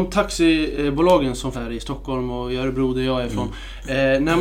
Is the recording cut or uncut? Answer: cut